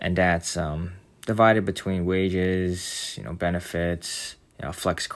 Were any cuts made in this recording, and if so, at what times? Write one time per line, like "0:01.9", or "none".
none